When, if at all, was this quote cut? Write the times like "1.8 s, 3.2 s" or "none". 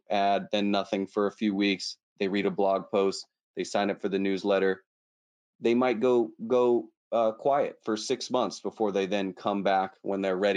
none